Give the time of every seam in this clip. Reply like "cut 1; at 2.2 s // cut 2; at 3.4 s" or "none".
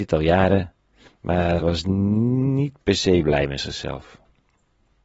cut 1; at 1.6 s